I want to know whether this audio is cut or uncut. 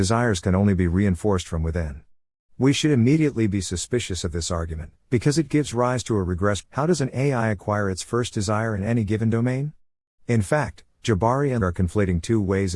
cut